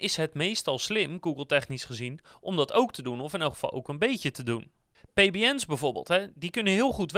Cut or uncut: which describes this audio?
uncut